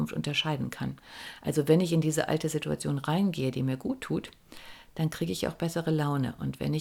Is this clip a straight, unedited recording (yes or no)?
yes